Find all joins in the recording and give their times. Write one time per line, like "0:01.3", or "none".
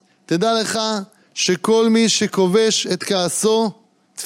none